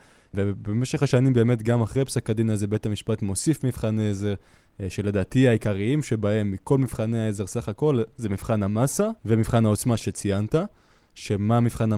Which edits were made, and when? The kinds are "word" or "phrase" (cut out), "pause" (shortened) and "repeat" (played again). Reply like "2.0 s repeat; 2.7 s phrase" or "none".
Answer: 9.2 s pause